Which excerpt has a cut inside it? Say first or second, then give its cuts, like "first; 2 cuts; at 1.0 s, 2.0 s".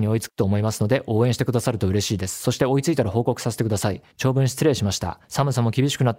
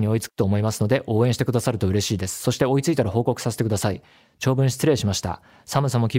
first; 2 cuts; at 4.1 s, 5.2 s